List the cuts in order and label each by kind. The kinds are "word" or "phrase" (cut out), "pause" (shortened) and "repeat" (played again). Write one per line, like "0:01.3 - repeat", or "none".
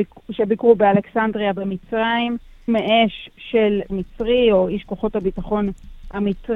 0:02.7 - word
0:03.9 - word